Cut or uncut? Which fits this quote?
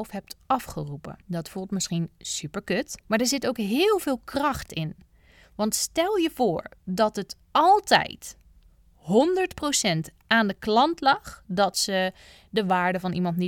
cut